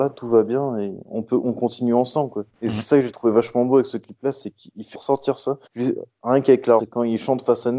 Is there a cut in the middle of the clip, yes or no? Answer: yes